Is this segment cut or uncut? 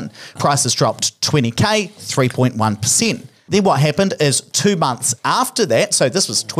uncut